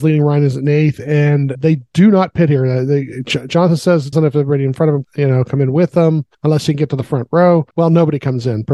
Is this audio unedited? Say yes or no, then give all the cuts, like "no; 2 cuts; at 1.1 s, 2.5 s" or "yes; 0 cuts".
no; 5 cuts; at 1.5 s, 4.1 s, 5.0 s, 6.3 s, 7.7 s